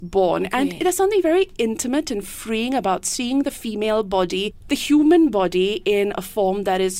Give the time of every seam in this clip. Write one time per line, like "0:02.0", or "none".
none

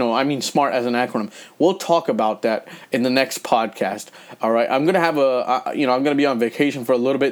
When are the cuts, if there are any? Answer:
none

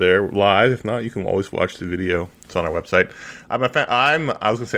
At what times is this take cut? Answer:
none

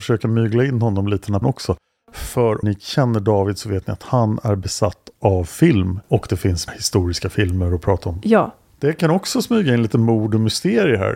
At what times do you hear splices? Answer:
0:01.4
0:02.6
0:06.0
0:06.7

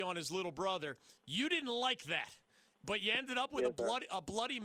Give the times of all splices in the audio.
0:01.2

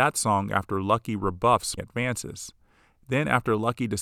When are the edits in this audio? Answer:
0:01.8

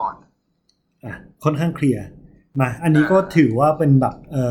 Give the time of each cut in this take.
none

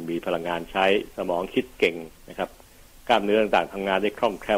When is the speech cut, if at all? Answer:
none

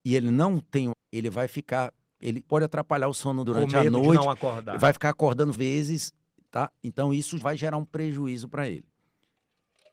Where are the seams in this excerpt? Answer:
0:00.9
0:02.4
0:03.4
0:05.5
0:07.4

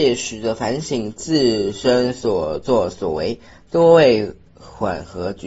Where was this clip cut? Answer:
none

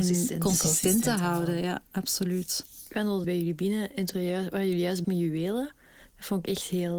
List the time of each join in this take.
0:02.9
0:03.2
0:04.1
0:05.0

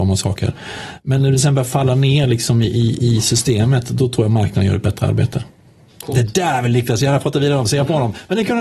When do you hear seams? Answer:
none

